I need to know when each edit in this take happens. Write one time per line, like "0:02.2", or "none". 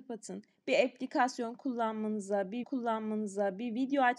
0:02.6